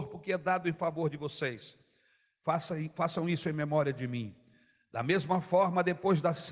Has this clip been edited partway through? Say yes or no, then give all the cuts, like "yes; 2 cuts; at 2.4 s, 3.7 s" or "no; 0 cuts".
no; 0 cuts